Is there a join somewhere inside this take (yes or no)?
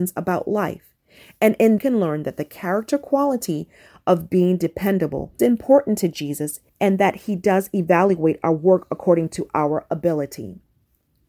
yes